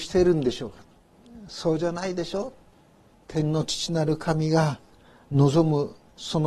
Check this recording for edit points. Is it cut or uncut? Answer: cut